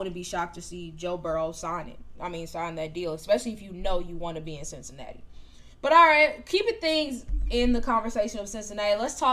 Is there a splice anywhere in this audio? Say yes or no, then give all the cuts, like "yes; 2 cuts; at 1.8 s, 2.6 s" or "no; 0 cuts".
yes; 1 cut; at 5.7 s